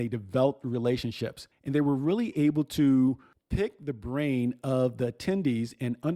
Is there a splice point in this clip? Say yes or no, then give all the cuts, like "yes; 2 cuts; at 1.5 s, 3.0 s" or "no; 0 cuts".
no; 0 cuts